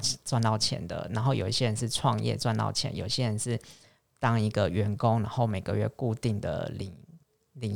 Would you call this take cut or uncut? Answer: uncut